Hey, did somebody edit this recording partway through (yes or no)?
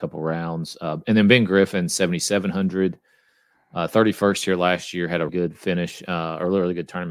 yes